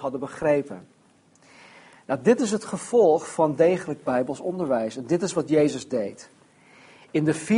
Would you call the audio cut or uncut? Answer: uncut